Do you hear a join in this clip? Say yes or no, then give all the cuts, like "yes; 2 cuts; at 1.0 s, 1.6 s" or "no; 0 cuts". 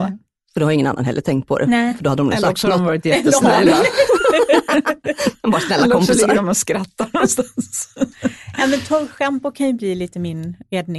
no; 0 cuts